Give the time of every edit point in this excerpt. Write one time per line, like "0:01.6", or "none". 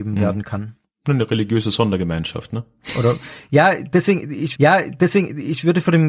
0:04.5